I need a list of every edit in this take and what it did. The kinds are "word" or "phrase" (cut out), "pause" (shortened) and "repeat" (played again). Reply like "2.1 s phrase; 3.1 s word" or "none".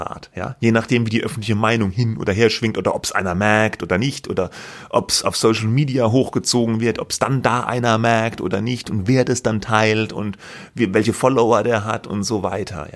none